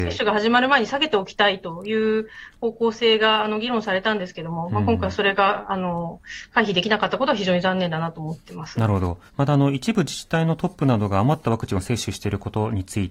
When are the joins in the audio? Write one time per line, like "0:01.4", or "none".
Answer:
0:09.3